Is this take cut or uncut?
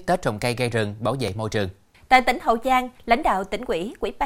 uncut